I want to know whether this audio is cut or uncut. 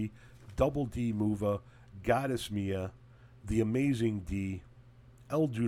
uncut